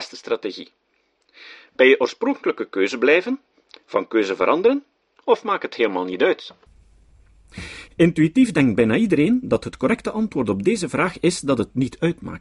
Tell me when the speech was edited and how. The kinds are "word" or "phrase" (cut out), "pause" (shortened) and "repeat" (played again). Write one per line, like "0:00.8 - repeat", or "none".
none